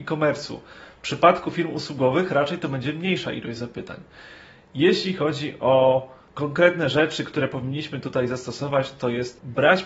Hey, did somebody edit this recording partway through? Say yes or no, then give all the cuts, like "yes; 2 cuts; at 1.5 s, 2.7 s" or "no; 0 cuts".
no; 0 cuts